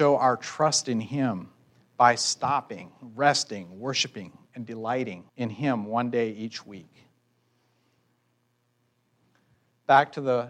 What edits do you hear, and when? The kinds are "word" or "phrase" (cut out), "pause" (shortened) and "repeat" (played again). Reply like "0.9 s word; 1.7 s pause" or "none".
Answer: 5.3 s pause